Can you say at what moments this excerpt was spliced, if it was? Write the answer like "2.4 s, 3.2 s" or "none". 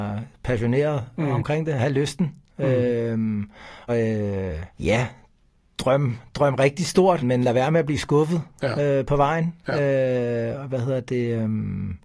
3.9 s, 4.7 s, 7.2 s